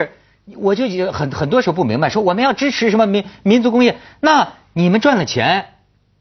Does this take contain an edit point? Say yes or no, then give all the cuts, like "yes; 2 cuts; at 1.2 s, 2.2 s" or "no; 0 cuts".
no; 0 cuts